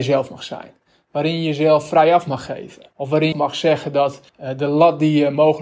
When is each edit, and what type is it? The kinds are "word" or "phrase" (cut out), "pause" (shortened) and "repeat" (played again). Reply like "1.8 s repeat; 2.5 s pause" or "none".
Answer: 2.9 s pause; 3.3 s phrase; 4.3 s pause